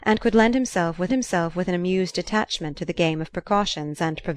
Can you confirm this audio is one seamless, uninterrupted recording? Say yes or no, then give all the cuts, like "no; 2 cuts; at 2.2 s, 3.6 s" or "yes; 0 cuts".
no; 1 cut; at 1.1 s